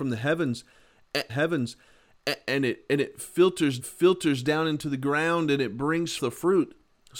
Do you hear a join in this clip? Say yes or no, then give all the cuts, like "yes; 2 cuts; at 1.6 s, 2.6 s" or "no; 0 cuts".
yes; 3 cuts; at 1.3 s, 3.8 s, 6.2 s